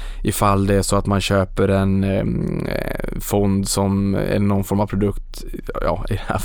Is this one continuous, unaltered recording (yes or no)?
yes